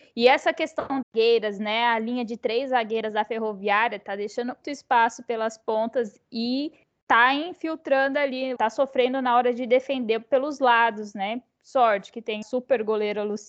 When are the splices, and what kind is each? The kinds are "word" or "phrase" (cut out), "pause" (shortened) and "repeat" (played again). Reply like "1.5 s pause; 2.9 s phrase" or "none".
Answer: 1.0 s word; 4.6 s word; 6.8 s pause; 8.6 s word; 12.4 s word